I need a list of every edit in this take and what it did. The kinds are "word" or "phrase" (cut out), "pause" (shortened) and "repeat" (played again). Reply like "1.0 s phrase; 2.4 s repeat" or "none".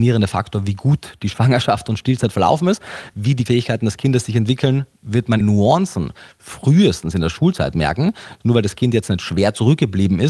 3.5 s word; 5.4 s phrase

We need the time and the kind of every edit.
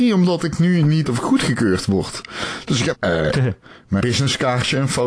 1.0 s word; 2.9 s word; 4.0 s word

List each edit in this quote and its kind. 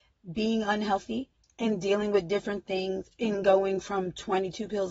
none

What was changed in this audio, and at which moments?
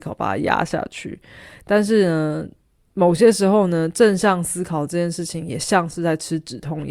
none

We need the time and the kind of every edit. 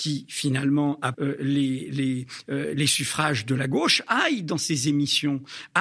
1.1 s word

